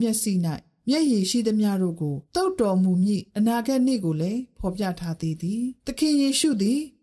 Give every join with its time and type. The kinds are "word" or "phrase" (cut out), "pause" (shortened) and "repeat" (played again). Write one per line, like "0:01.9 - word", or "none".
0:02.2 - pause
0:03.3 - pause
0:05.8 - pause

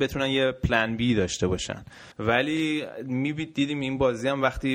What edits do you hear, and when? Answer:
0:02.1 - pause

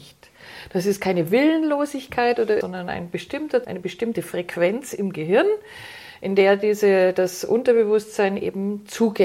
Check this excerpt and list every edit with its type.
0:02.6 - word
0:03.6 - word

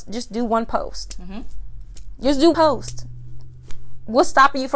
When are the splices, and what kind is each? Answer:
0:02.5 - word

